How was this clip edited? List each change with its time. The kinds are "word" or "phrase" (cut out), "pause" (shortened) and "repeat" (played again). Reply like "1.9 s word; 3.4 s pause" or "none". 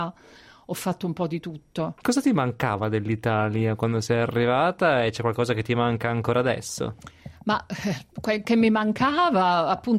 none